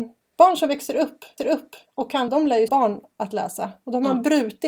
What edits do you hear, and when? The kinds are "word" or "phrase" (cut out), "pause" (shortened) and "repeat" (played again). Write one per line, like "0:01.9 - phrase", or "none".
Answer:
0:01.4 - repeat
0:02.3 - word
0:02.7 - word